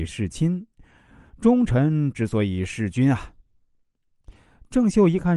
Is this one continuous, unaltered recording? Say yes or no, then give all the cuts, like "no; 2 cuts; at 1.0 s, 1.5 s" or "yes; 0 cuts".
yes; 0 cuts